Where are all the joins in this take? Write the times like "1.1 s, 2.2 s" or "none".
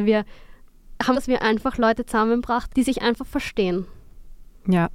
1.1 s, 2.7 s